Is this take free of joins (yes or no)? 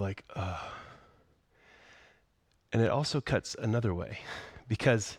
yes